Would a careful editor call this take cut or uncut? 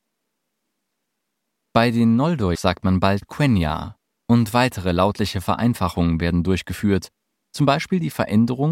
cut